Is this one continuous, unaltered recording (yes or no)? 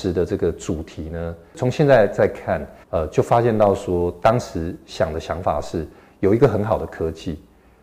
no